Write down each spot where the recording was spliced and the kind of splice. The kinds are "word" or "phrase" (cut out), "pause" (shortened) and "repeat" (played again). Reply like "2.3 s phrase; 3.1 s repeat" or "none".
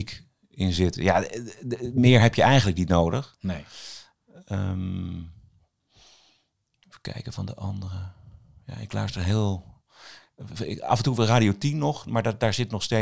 none